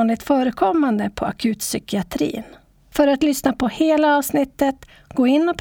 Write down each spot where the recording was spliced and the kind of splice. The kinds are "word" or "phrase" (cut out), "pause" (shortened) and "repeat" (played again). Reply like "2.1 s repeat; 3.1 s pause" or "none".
none